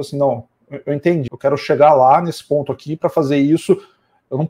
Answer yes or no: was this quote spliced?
yes